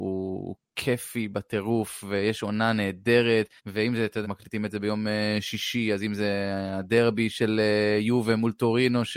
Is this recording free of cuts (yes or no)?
no